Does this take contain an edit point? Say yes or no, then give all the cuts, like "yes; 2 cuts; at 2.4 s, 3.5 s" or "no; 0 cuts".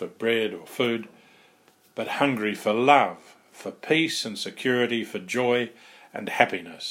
no; 0 cuts